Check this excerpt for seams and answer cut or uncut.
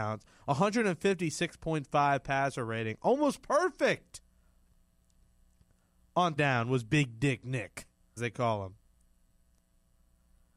cut